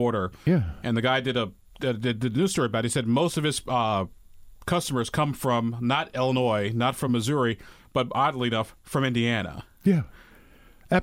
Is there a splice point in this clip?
no; 0 cuts

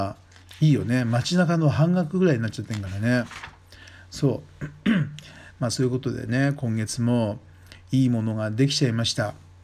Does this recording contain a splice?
no; 0 cuts

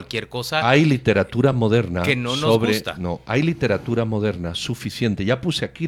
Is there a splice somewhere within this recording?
no; 0 cuts

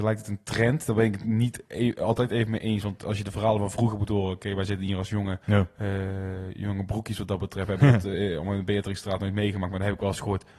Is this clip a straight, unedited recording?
no; 1 cut; at 5.4 s

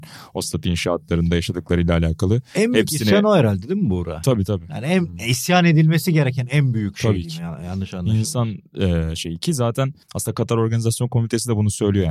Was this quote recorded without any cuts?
no; 1 cut; at 10.0 s

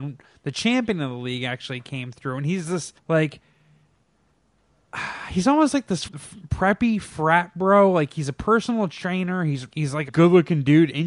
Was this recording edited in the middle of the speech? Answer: yes; 4 cuts; at 3.0 s, 6.1 s, 9.7 s, 10.1 s

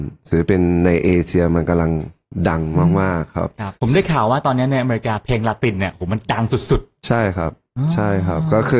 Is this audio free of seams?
no; 1 cut; at 3.7 s

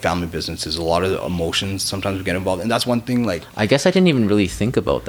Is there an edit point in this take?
no; 0 cuts

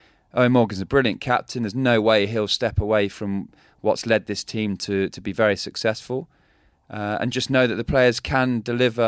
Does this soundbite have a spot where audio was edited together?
no; 0 cuts

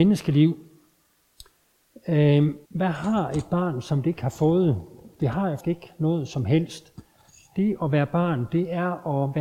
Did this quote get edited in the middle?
yes; 2 cuts; at 2.7 s, 5.6 s

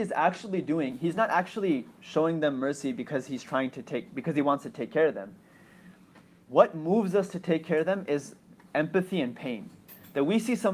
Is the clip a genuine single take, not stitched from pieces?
yes; 0 cuts

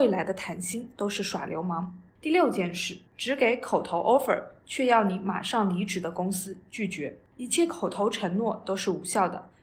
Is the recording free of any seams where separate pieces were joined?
no; 3 cuts; at 2.1 s, 3.1 s, 7.3 s

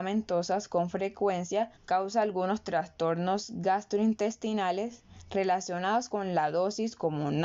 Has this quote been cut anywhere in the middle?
yes; 1 cut; at 1.8 s

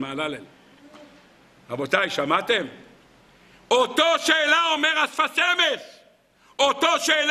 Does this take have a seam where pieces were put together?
no; 0 cuts

